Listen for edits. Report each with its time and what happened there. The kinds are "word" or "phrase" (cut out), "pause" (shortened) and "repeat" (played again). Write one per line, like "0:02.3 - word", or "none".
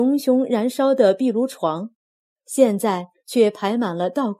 none